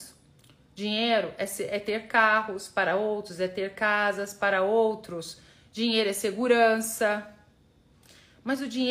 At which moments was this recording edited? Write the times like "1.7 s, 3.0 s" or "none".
none